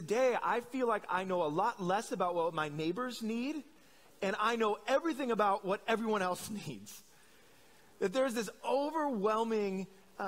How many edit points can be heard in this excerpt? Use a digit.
0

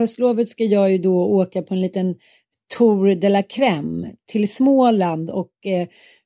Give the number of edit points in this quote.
0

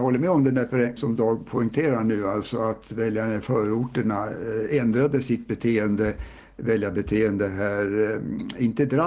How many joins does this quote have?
1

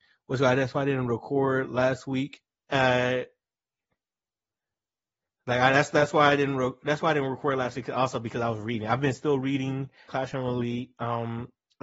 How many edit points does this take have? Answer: 2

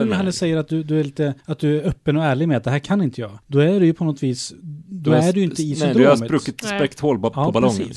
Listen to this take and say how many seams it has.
2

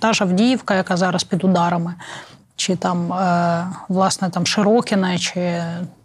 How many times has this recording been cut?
0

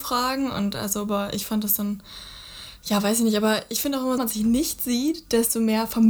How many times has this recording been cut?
1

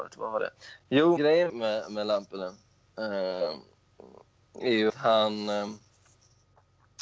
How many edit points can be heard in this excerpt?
3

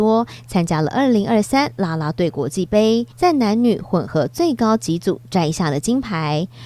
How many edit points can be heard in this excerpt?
1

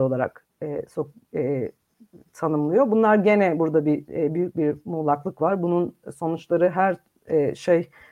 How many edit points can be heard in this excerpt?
0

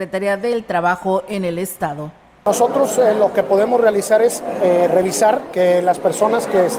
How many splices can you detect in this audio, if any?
0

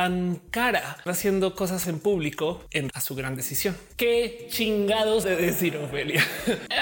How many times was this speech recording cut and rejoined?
4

